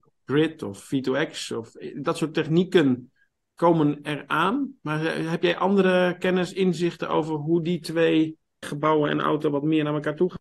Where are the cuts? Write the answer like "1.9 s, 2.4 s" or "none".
8.6 s

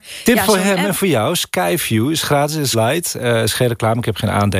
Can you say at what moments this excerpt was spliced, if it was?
2.7 s

